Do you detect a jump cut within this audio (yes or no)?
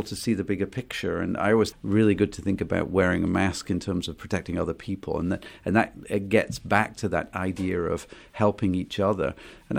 yes